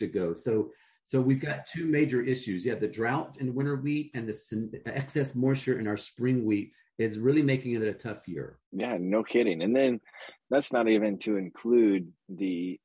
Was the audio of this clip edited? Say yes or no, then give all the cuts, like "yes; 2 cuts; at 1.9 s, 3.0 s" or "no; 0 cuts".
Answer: yes; 1 cut; at 8.7 s